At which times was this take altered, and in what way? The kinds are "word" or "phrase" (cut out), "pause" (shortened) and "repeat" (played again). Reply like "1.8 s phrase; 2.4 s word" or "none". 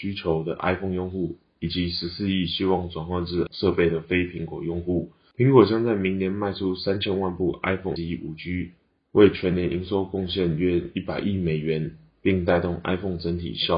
3.5 s word; 8.0 s word